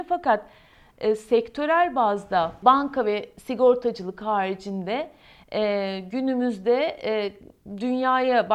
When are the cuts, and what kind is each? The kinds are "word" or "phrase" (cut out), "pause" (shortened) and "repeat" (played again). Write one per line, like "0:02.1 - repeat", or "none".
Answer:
none